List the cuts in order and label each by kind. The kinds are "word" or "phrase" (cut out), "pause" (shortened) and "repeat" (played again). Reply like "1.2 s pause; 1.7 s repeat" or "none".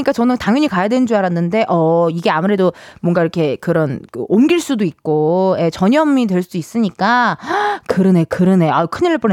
none